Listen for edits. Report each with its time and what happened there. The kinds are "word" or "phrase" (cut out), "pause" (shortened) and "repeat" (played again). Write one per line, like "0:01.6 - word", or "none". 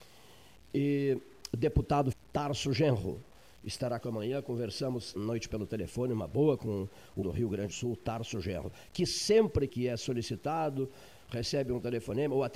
0:02.1 - word
0:04.0 - word
0:05.1 - word
0:05.5 - word
0:06.6 - word
0:07.2 - word
0:07.7 - word
0:09.7 - word